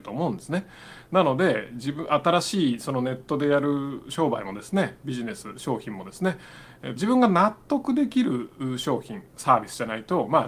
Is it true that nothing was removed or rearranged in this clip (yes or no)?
no